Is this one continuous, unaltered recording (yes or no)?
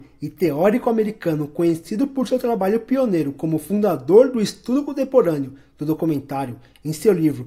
yes